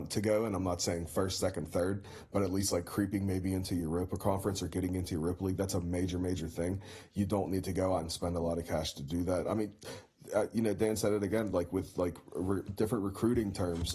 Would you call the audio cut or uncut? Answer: uncut